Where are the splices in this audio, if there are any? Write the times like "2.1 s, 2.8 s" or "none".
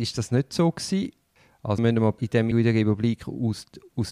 1.8 s, 2.2 s, 2.5 s